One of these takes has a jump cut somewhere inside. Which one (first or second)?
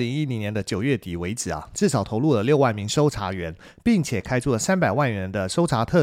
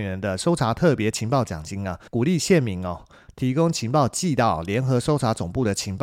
second